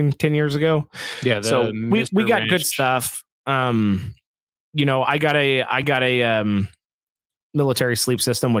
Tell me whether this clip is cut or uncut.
uncut